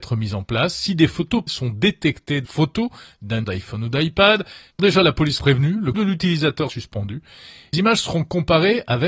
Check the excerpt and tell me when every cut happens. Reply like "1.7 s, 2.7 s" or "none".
1.5 s, 2.4 s, 3.4 s, 4.8 s, 5.4 s, 5.9 s, 6.7 s, 7.7 s